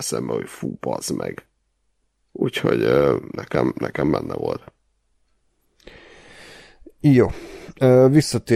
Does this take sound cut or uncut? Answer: uncut